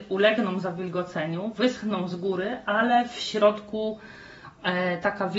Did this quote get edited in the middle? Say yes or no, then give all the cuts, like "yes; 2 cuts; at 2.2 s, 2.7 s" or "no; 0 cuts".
no; 0 cuts